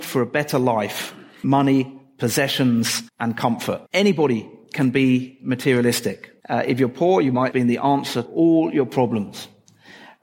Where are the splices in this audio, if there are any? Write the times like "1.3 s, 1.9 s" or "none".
1.4 s, 3.1 s, 3.9 s, 6.4 s, 7.5 s, 8.2 s